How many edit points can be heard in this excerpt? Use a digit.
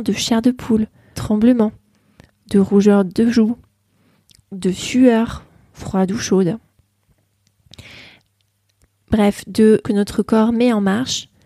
2